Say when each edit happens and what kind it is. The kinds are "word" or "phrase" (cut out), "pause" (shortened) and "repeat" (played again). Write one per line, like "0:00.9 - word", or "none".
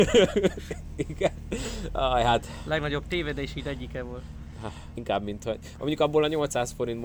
0:05.0 - word